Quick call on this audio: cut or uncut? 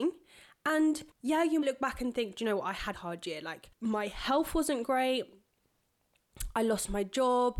cut